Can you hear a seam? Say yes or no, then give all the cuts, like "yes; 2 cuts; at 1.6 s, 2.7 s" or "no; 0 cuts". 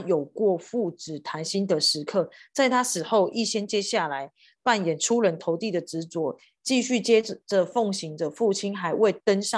no; 0 cuts